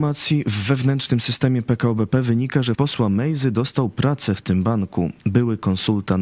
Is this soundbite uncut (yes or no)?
no